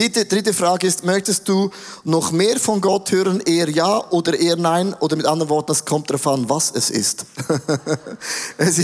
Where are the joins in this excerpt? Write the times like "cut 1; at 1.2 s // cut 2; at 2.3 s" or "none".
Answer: none

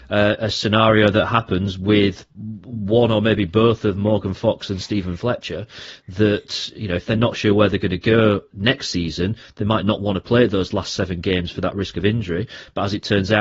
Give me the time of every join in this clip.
cut 1; at 2.3 s

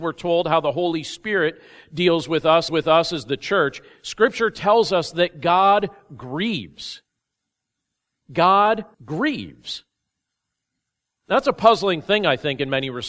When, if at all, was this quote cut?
cut 1; at 2.7 s // cut 2; at 8.9 s

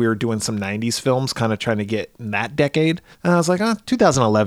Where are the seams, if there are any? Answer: cut 1; at 3.1 s

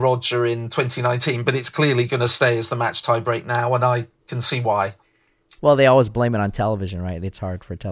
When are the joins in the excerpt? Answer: cut 1; at 5.6 s

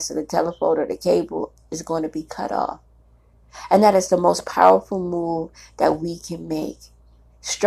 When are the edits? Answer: none

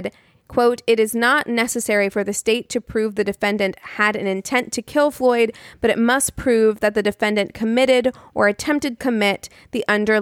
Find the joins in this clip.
cut 1; at 9.0 s

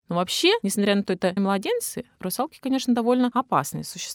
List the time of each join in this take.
cut 1; at 1.1 s // cut 2; at 1.4 s

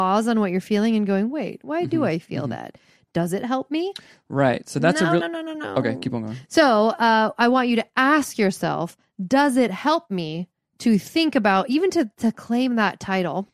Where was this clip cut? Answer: none

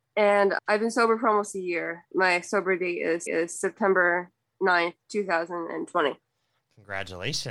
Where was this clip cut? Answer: cut 1; at 3.3 s // cut 2; at 5.0 s

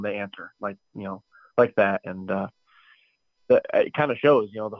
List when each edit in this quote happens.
none

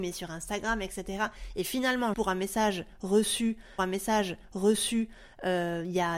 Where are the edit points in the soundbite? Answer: cut 1; at 2.1 s // cut 2; at 3.8 s

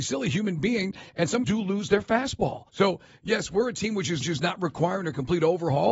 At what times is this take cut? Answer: cut 1; at 1.4 s // cut 2; at 2.7 s // cut 3; at 4.2 s

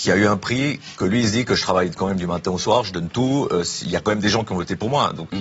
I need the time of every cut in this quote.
none

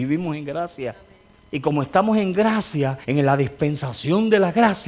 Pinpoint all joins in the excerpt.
cut 1; at 1.3 s // cut 2; at 3.0 s

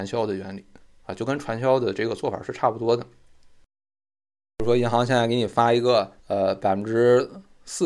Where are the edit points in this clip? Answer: cut 1; at 6.2 s

